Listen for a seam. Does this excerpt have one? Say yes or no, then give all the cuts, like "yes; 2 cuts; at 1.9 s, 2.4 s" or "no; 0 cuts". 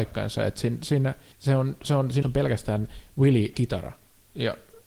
yes; 3 cuts; at 1.3 s, 2.2 s, 3.5 s